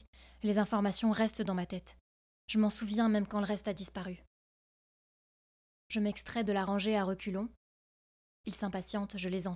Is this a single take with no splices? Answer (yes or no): yes